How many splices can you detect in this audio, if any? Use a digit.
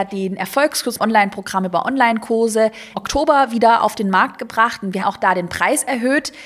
3